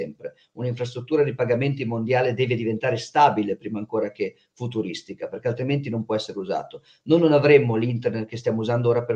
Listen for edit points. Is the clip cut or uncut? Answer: uncut